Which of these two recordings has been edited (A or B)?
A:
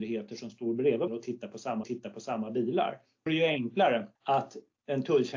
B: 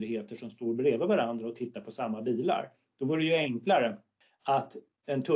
A